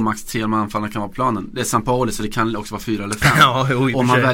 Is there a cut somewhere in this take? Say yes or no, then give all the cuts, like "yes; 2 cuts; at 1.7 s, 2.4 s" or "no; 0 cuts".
no; 0 cuts